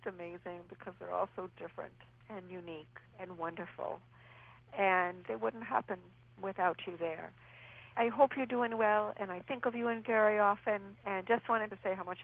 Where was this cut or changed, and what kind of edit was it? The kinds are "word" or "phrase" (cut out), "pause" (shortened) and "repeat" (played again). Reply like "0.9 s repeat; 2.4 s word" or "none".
none